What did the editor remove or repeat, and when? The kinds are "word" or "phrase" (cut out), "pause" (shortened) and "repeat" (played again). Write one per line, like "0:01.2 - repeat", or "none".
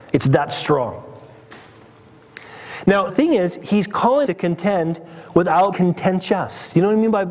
0:03.1 - word
0:04.2 - word
0:05.7 - word